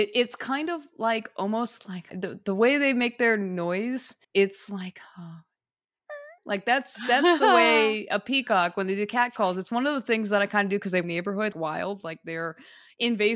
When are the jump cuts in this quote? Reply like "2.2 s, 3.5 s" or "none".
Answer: 2.1 s, 4.2 s, 6.4 s, 11.0 s, 11.5 s